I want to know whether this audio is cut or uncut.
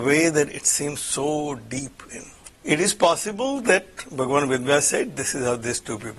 cut